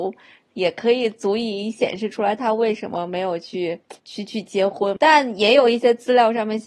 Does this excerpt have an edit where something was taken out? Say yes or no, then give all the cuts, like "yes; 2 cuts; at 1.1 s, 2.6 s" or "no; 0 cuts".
yes; 1 cut; at 4.0 s